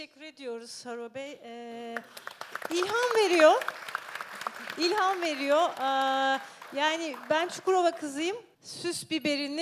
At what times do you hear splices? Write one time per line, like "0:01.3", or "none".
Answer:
0:08.5

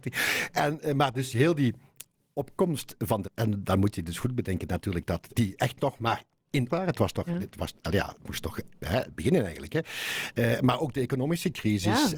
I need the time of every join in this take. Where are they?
0:03.2
0:05.3
0:06.7

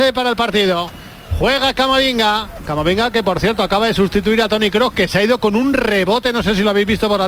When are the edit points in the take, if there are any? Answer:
none

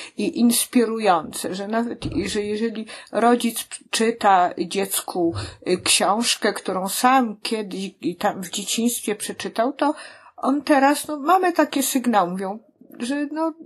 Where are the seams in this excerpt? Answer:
none

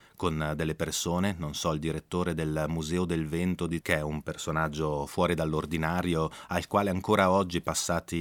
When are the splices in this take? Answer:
0:03.8

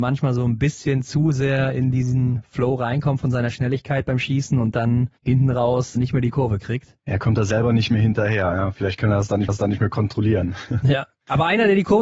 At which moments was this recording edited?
0:05.2
0:06.0
0:09.5

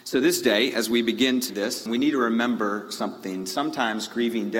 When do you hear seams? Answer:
0:01.5
0:01.9

